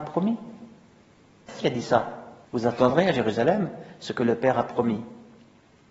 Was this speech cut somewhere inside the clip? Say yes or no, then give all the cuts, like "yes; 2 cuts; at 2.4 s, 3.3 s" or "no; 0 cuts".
yes; 2 cuts; at 1.6 s, 2.4 s